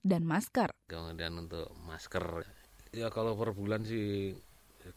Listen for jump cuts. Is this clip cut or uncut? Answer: cut